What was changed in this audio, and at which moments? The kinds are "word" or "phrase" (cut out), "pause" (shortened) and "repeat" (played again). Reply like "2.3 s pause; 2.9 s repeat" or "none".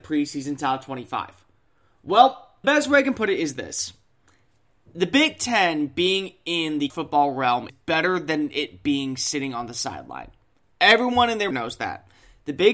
2.6 s word; 6.9 s word; 7.7 s word; 11.5 s word